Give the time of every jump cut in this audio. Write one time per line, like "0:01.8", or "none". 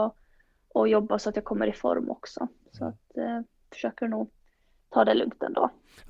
none